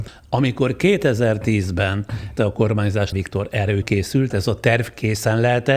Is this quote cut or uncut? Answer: cut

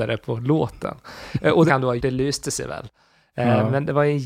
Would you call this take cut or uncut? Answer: cut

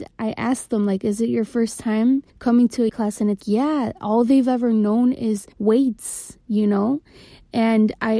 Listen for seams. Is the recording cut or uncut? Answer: cut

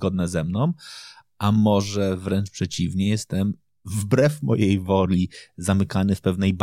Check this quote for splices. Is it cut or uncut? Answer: uncut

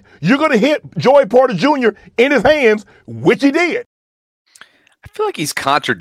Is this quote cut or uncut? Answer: uncut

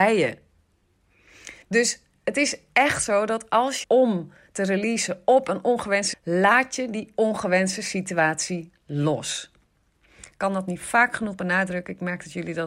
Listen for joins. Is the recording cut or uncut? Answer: cut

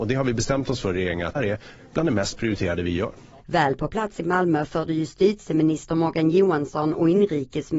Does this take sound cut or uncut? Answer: cut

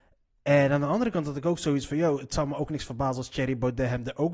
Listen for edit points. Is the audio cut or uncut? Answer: uncut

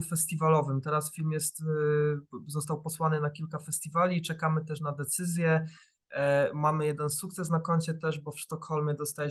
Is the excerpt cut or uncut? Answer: uncut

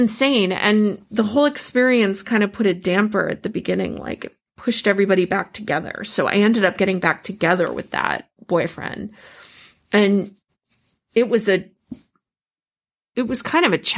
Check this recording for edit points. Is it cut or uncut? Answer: uncut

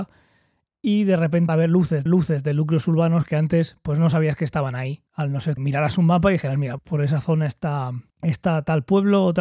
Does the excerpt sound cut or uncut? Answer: cut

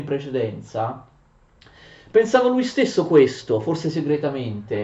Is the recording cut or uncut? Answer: uncut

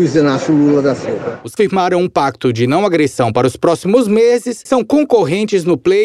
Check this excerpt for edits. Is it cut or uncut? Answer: cut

